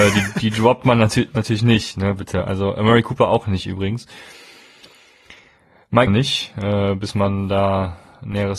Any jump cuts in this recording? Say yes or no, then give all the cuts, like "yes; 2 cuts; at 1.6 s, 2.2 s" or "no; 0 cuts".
yes; 1 cut; at 6.1 s